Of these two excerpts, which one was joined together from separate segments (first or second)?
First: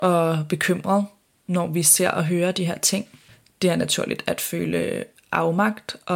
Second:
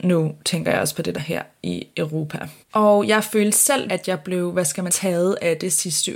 second